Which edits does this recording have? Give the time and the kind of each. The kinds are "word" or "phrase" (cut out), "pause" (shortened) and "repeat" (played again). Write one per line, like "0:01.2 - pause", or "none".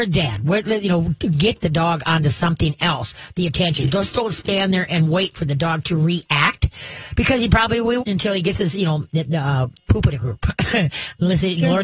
0:01.6 - word
0:08.0 - word
0:09.8 - word